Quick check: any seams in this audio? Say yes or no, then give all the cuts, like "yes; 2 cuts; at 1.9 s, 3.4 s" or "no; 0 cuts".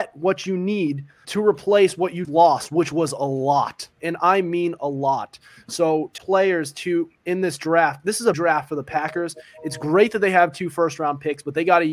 yes; 4 cuts; at 1.2 s, 2.2 s, 6.2 s, 8.3 s